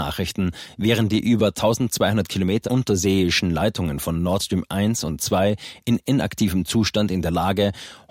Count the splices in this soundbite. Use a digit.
1